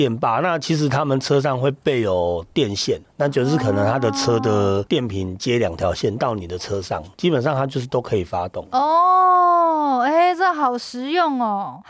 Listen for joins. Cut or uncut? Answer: cut